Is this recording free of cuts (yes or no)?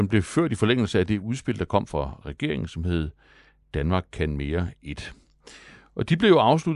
yes